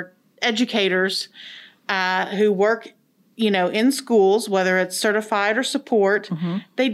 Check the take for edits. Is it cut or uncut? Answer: uncut